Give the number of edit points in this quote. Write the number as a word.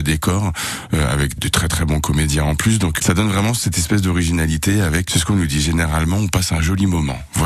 three